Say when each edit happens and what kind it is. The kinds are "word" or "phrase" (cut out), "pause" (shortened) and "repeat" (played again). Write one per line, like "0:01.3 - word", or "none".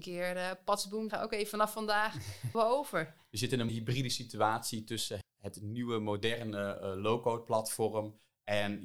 0:01.1 - word
0:02.5 - word
0:03.7 - word
0:05.2 - word